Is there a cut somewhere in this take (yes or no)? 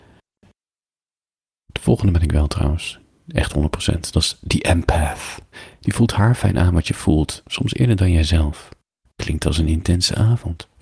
no